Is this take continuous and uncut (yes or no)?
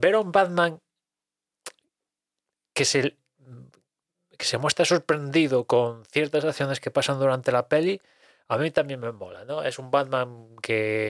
yes